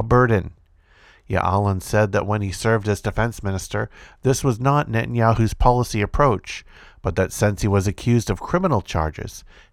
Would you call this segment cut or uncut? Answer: uncut